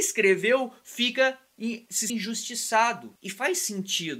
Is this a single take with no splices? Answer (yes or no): no